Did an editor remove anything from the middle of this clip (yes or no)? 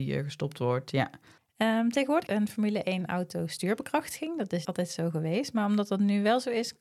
yes